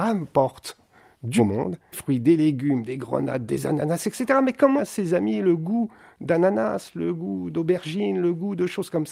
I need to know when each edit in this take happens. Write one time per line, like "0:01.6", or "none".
0:01.4
0:01.9
0:04.8